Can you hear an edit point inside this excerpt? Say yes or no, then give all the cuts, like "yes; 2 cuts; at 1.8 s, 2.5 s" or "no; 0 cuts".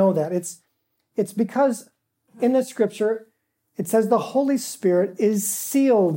no; 0 cuts